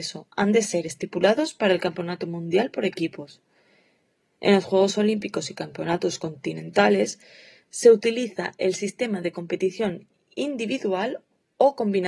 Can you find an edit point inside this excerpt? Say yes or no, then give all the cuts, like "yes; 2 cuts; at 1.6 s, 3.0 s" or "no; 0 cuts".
no; 0 cuts